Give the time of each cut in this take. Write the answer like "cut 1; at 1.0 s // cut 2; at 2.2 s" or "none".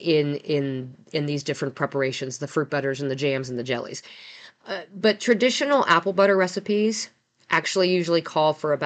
none